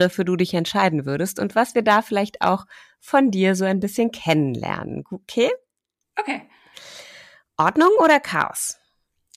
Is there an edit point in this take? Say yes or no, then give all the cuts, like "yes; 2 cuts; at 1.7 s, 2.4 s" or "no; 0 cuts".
no; 0 cuts